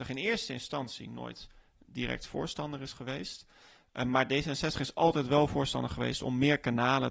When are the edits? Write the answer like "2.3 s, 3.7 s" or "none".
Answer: none